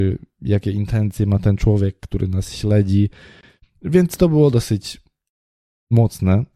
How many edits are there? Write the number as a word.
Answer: zero